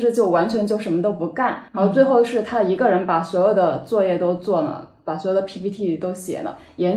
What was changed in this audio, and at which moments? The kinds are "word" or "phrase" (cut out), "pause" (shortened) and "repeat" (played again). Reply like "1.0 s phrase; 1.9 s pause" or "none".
1.7 s pause